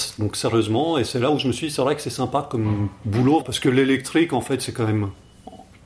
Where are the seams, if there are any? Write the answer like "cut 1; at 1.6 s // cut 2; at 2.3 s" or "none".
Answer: cut 1; at 3.4 s